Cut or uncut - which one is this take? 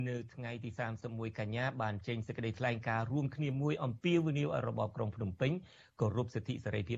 uncut